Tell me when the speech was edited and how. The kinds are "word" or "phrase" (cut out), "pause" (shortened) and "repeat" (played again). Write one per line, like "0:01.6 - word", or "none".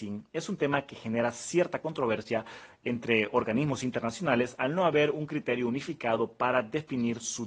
none

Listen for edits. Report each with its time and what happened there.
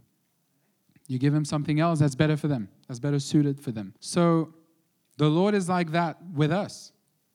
0:04.0 - pause

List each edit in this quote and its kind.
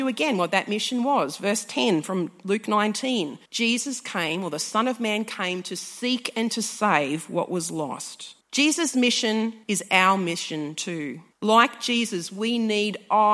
0:03.5 - pause
0:08.4 - pause
0:09.6 - pause
0:11.3 - pause

